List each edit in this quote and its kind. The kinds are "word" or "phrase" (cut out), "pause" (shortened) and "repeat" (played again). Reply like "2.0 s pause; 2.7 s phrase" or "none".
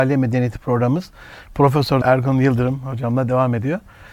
2.0 s word